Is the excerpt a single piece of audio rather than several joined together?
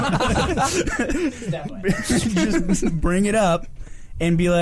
no; 2 cuts; at 1.7 s, 3.0 s

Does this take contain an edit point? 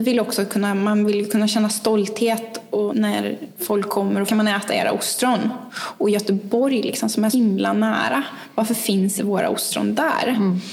yes; 4 cuts; at 2.9 s, 4.3 s, 7.3 s, 9.2 s

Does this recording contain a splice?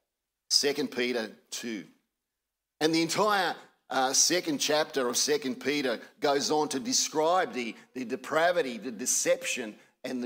no; 0 cuts

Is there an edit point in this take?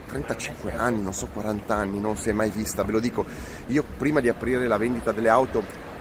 no; 0 cuts

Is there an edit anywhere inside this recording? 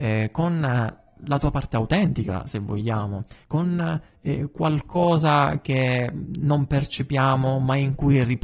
no; 0 cuts

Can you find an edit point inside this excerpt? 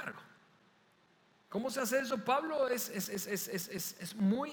no; 0 cuts

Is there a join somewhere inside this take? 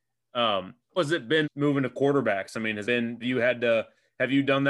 yes; 4 cuts; at 1.0 s, 1.4 s, 2.8 s, 3.2 s

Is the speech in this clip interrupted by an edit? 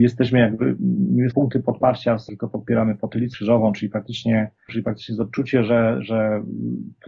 yes; 4 cuts; at 1.3 s, 2.3 s, 3.3 s, 4.7 s

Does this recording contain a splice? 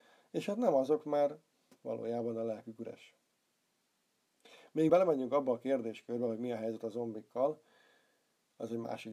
yes; 1 cut; at 4.9 s

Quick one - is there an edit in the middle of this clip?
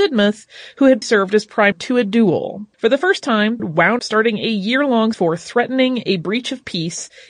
yes; 6 cuts; at 1.0 s, 1.7 s, 2.7 s, 3.6 s, 4.0 s, 5.1 s

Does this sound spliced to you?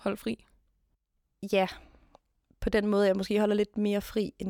no; 0 cuts

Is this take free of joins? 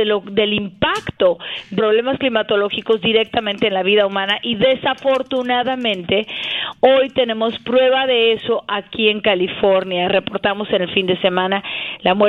no; 1 cut; at 1.8 s

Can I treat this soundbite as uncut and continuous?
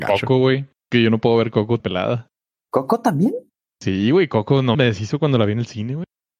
no; 2 cuts; at 1.8 s, 4.7 s

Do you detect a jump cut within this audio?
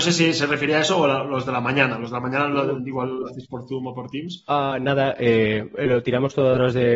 no; 0 cuts

